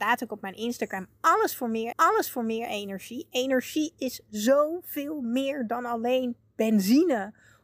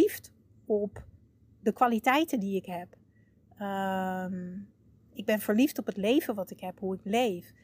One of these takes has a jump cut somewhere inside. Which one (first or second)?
first